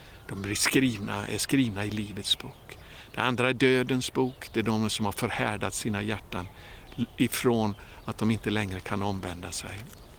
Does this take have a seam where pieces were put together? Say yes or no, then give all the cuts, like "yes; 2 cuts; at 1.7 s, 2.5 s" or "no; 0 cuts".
yes; 1 cut; at 4.9 s